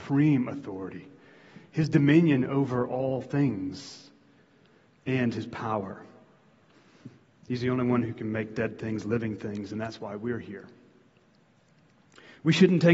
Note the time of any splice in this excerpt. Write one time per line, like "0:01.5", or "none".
none